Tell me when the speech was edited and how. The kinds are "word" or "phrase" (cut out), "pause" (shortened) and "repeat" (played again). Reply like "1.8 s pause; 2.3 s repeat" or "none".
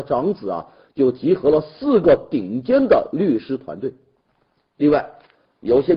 none